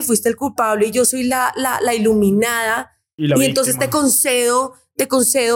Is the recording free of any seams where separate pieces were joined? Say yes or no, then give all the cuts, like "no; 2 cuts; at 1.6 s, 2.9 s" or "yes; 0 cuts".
yes; 0 cuts